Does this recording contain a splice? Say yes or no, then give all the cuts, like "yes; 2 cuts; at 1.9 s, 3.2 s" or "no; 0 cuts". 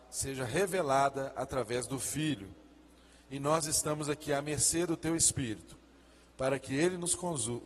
no; 0 cuts